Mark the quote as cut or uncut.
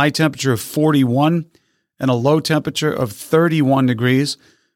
uncut